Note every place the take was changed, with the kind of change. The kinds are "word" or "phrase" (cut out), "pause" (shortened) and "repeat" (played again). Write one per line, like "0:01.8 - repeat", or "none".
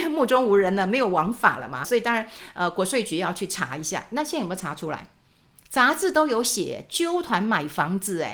0:01.8 - word